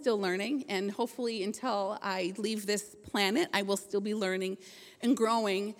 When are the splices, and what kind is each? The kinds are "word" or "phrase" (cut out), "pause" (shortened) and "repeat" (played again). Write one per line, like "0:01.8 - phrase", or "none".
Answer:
none